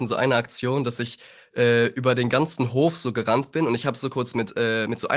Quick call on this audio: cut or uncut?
uncut